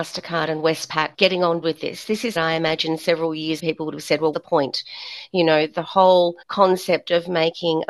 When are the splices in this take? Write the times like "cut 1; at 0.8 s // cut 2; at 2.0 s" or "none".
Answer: cut 1; at 1.1 s // cut 2; at 1.6 s // cut 3; at 2.3 s // cut 4; at 3.6 s // cut 5; at 4.3 s // cut 6; at 6.4 s

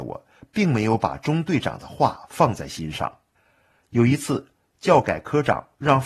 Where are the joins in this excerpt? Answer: cut 1; at 3.4 s

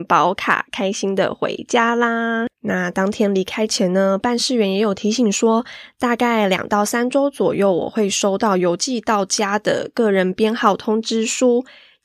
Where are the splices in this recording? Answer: cut 1; at 2.5 s

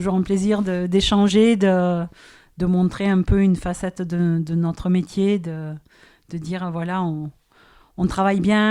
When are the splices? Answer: none

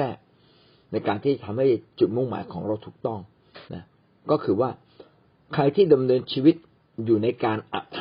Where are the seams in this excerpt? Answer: cut 1; at 3.7 s // cut 2; at 5.2 s

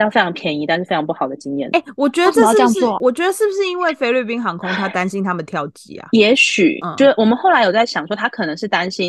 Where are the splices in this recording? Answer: cut 1; at 3.0 s

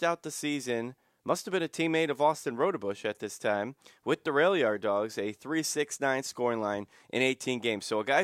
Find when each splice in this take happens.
none

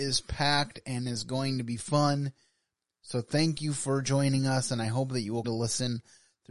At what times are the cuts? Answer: cut 1; at 5.4 s

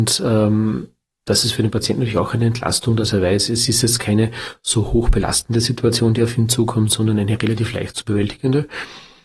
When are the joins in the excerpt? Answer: none

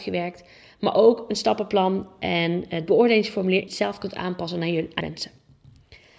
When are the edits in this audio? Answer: cut 1; at 3.7 s // cut 2; at 5.0 s

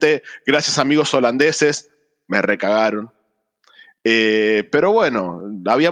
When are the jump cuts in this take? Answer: none

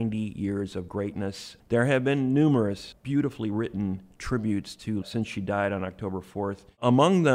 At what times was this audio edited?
cut 1; at 5.0 s

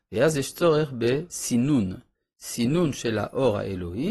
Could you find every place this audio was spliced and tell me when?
none

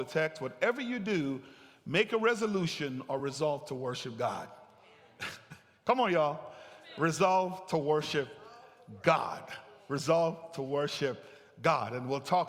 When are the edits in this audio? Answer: none

